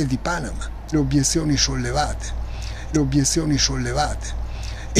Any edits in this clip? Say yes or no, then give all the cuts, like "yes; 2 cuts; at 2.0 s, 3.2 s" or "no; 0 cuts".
yes; 2 cuts; at 0.9 s, 2.9 s